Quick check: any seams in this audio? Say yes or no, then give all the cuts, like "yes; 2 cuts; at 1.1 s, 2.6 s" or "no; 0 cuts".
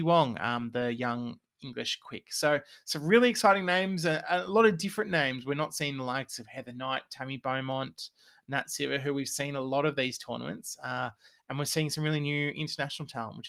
no; 0 cuts